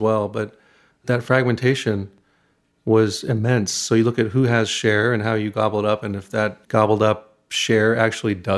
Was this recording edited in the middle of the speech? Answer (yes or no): yes